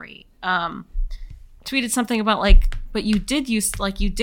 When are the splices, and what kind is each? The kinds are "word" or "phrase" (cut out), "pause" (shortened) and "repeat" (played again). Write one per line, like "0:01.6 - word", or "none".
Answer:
none